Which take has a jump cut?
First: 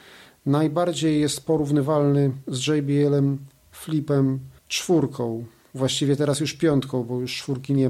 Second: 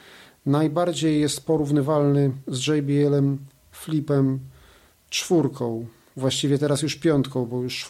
first; 1 cut; at 4.6 s

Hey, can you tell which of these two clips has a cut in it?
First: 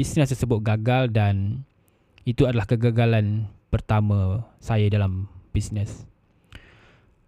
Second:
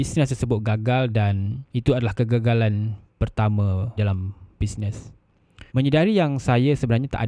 second; 3 cuts; at 1.7 s, 4.0 s, 5.7 s

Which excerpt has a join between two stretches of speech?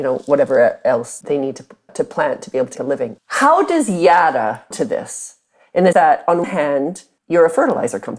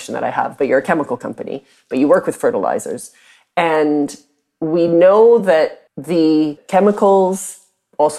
first; 6 cuts; at 1.2 s, 1.9 s, 2.7 s, 4.7 s, 5.9 s, 6.4 s

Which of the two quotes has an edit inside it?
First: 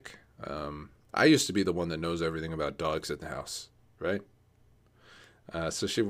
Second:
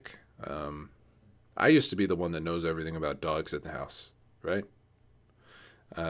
first; 1 cut; at 1.0 s

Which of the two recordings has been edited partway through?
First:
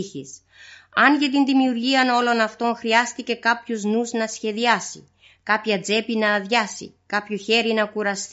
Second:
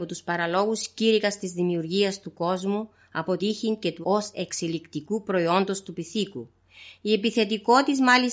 second; 2 cuts; at 3.4 s, 4.0 s

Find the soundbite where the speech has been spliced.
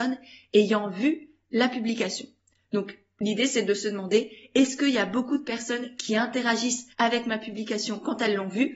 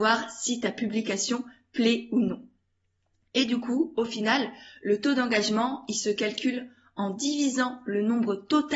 first; 1 cut; at 6.9 s

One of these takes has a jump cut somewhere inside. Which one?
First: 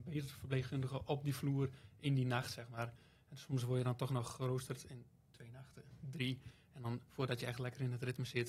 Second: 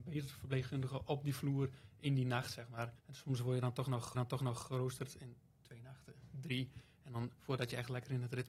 second; 2 cuts; at 3.0 s, 4.1 s

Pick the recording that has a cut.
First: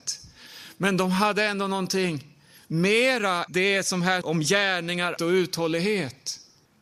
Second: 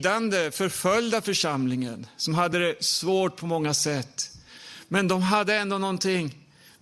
first; 3 cuts; at 3.5 s, 4.2 s, 5.2 s

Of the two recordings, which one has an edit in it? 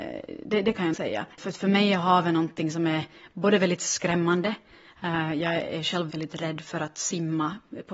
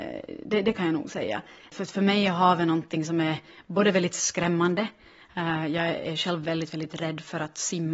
first; 3 cuts; at 0.9 s, 1.3 s, 6.1 s

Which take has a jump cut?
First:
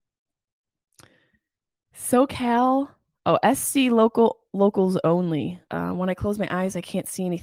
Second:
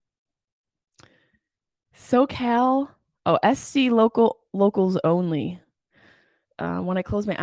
first; 1 cut; at 5.6 s

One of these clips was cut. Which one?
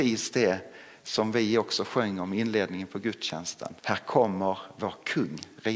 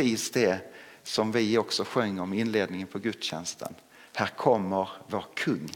first; 1 cut; at 3.8 s

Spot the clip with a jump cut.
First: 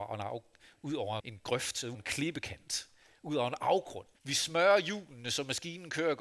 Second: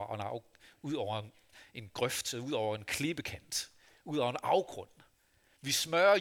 first; 3 cuts; at 1.2 s, 1.9 s, 4.1 s

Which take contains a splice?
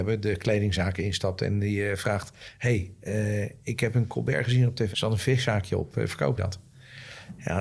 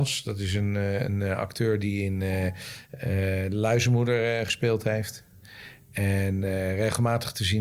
first; 2 cuts; at 4.9 s, 6.4 s

